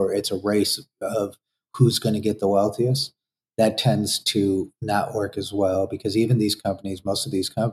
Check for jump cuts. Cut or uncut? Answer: uncut